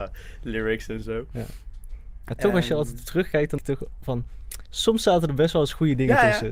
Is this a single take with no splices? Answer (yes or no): no